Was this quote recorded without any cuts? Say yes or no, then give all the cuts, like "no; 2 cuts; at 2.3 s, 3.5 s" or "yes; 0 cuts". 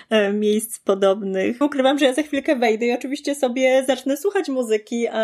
no; 1 cut; at 1.6 s